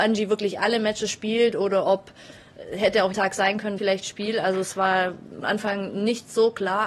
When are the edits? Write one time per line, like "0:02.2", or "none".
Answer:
0:03.1
0:03.8
0:05.4